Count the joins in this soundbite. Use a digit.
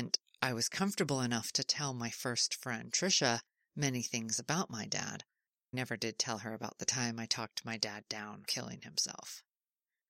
2